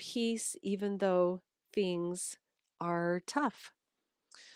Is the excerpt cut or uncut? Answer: uncut